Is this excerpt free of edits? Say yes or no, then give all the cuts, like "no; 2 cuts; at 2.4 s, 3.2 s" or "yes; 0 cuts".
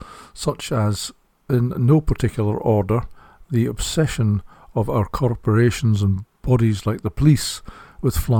no; 1 cut; at 6.3 s